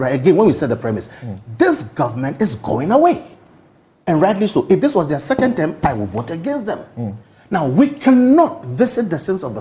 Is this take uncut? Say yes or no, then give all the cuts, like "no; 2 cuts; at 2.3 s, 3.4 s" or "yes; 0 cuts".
yes; 0 cuts